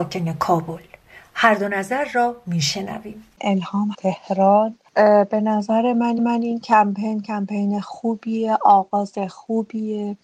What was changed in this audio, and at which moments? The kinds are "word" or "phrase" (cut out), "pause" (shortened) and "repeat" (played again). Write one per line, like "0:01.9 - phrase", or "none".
0:03.9 - phrase
0:06.2 - repeat